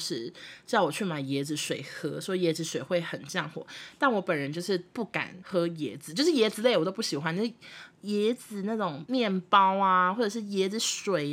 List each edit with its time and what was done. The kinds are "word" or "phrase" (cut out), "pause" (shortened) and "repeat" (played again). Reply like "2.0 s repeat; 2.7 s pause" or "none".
7.9 s pause